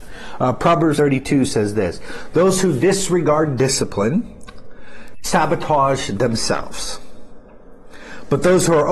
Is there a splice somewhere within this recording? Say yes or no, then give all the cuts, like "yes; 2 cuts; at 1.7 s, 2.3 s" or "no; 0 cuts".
yes; 1 cut; at 1.0 s